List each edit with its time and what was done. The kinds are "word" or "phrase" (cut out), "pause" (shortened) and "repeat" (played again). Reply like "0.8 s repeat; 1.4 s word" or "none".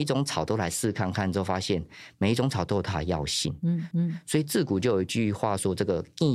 3.9 s repeat